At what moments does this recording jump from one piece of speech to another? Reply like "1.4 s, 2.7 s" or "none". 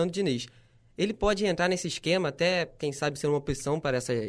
none